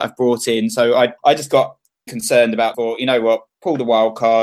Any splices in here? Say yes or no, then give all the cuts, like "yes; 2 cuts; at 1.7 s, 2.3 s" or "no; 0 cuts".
yes; 4 cuts; at 1.2 s, 2.1 s, 2.7 s, 3.5 s